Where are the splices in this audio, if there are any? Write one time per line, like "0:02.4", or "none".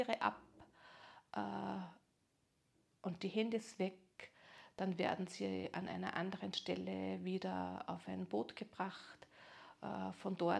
none